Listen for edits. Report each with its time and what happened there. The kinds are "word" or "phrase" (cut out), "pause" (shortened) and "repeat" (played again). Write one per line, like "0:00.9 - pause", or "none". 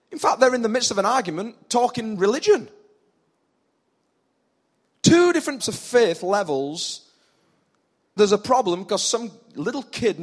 0:02.2 - word
0:05.6 - word
0:08.2 - word